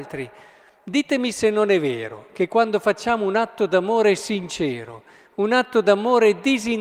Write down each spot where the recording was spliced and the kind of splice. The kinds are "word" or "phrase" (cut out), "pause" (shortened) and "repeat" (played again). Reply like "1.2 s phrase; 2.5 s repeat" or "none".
none